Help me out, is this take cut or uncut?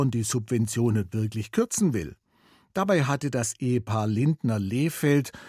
uncut